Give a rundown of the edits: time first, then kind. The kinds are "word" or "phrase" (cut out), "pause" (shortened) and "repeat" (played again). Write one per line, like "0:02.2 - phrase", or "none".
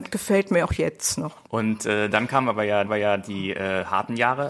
0:01.4 - pause
0:02.8 - repeat